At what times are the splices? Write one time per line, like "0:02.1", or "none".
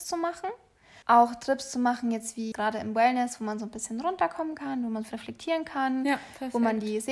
0:01.0
0:02.5
0:05.1